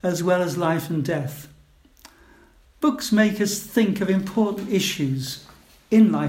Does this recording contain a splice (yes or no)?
no